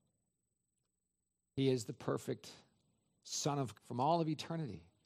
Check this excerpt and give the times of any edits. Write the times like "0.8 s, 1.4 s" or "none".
3.7 s